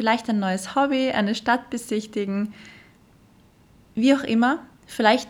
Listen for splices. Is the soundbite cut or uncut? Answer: uncut